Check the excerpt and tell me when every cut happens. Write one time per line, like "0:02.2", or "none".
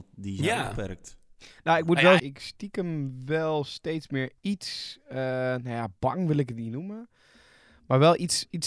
0:02.2
0:04.4